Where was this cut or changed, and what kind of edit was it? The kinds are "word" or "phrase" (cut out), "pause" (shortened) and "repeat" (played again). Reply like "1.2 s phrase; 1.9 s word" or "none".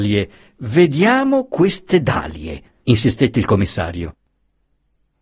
none